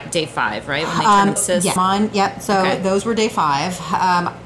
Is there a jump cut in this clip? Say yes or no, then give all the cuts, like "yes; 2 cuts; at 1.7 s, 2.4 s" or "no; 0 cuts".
yes; 2 cuts; at 1.4 s, 1.8 s